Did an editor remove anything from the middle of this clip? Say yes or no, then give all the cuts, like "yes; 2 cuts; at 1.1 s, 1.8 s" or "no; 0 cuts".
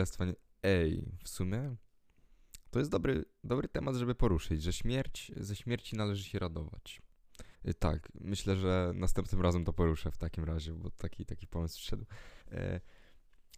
yes; 2 cuts; at 7.5 s, 12.4 s